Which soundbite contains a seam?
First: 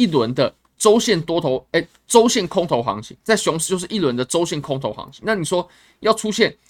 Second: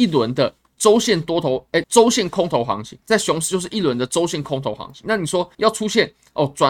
second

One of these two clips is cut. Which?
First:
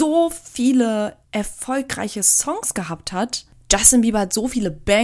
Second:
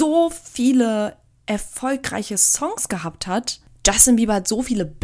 first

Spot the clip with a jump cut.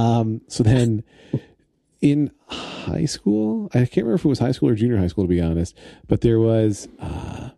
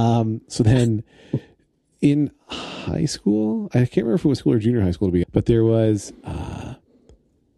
second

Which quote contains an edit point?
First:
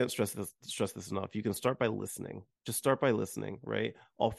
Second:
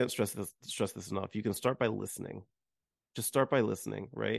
first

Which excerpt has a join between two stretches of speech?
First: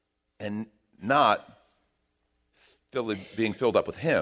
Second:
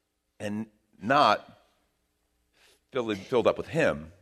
second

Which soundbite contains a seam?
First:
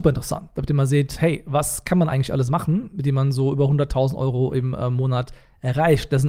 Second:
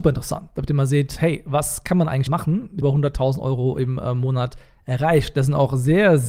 second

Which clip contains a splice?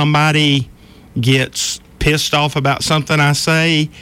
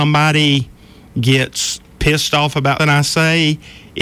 second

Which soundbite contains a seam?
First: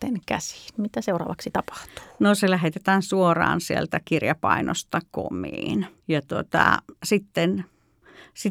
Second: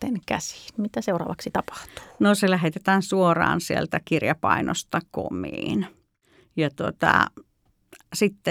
first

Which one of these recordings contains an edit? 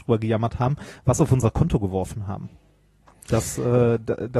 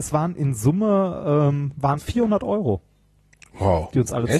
second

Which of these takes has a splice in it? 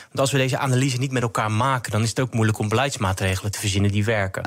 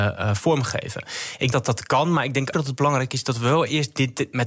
second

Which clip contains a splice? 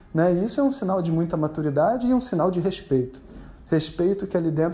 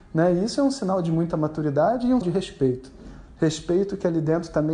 second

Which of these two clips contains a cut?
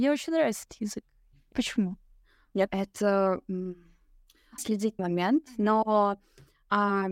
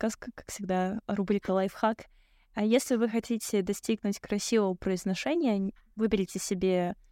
first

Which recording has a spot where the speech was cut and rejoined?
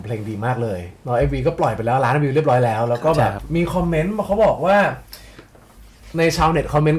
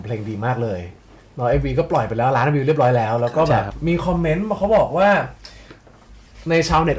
first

